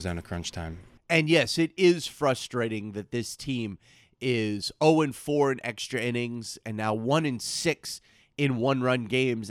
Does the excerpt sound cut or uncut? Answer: uncut